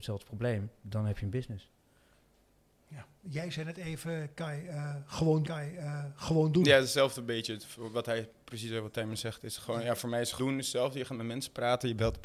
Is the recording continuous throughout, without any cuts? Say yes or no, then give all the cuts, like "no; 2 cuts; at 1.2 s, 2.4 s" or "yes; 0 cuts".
no; 3 cuts; at 3.2 s, 5.4 s, 10.4 s